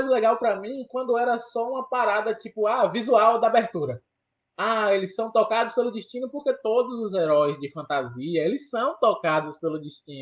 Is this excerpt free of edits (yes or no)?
yes